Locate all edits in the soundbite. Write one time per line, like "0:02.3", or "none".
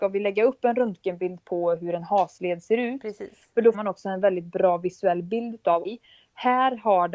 0:03.7
0:05.8